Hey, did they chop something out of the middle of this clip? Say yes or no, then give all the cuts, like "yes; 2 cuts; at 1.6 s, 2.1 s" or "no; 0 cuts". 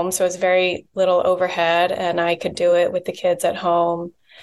no; 0 cuts